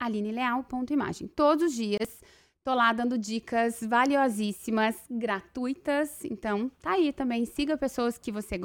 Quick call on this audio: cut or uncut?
uncut